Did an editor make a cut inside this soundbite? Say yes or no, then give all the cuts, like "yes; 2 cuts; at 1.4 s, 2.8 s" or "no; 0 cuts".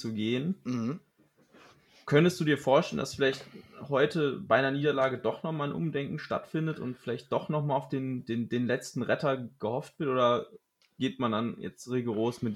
no; 0 cuts